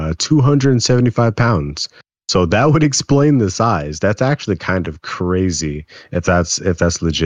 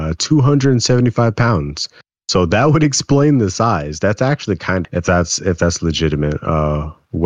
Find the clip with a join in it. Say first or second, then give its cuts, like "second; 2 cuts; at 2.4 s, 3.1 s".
second; 1 cut; at 4.8 s